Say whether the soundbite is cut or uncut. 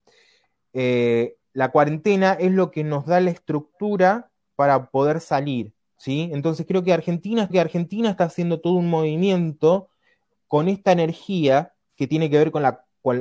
cut